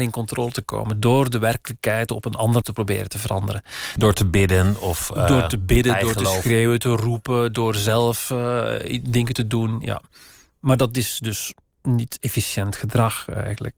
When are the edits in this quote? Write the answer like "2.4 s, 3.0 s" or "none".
2.6 s